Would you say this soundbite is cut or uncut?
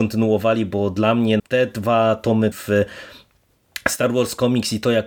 cut